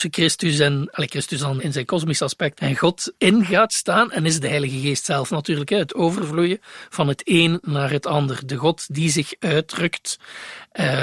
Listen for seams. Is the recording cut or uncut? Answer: cut